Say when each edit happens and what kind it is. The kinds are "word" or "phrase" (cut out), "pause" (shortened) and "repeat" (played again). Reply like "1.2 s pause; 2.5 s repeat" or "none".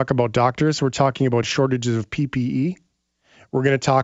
none